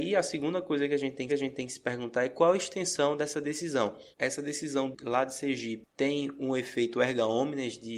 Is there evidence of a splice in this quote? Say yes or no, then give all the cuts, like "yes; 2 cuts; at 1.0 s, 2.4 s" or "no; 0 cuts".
yes; 2 cuts; at 1.3 s, 4.1 s